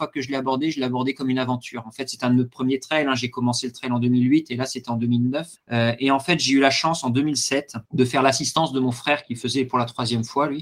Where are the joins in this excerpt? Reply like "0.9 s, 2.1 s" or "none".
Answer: 7.8 s